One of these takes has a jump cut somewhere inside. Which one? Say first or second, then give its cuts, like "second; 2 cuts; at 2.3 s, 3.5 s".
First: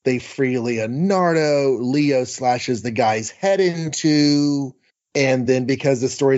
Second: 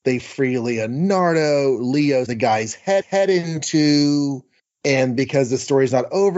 second; 3 cuts; at 2.3 s, 3.0 s, 5.2 s